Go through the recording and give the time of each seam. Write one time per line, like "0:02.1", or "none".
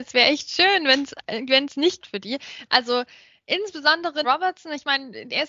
0:02.0
0:04.2